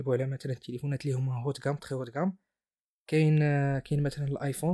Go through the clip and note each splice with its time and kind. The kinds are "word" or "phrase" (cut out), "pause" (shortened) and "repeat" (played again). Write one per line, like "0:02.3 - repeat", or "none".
none